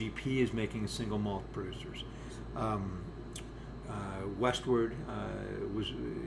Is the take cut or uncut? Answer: cut